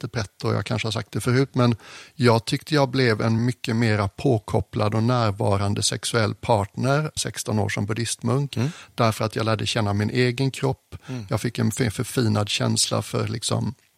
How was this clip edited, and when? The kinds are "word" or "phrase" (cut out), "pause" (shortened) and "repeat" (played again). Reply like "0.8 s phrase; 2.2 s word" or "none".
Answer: 3.4 s word; 7.2 s phrase

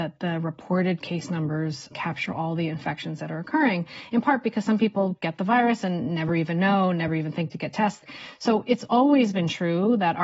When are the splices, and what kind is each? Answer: none

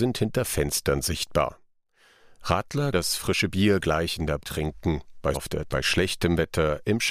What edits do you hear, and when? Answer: 2.9 s word; 4.4 s word; 5.3 s word; 5.7 s word

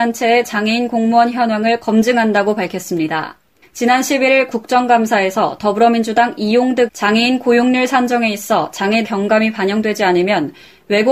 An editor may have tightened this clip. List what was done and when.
1.8 s word; 3.6 s pause; 4.5 s word; 6.9 s word; 9.0 s phrase

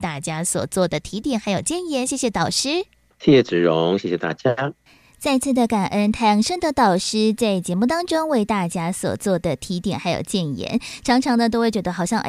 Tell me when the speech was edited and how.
none

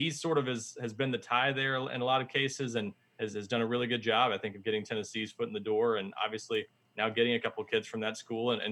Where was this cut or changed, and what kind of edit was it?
none

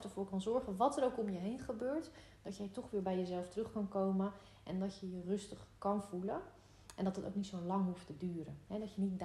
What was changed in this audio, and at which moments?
none

